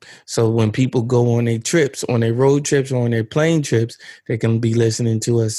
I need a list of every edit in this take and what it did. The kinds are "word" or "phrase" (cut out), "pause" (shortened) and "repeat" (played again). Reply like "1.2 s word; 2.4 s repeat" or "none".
none